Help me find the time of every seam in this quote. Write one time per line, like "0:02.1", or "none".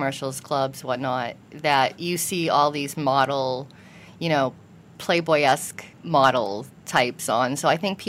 0:02.9
0:05.0
0:05.9